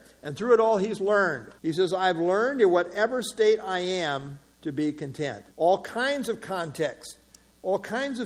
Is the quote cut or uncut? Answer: cut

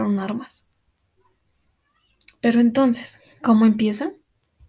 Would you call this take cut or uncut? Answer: uncut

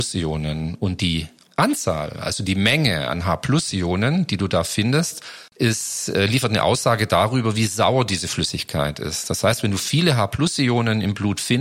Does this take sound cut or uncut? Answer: cut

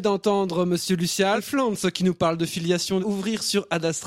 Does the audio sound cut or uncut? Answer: cut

